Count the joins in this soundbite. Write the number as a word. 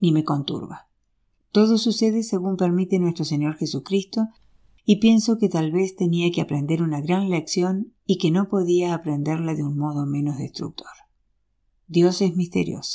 zero